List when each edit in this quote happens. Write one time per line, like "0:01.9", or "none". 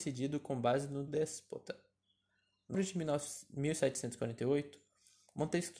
0:01.1
0:02.7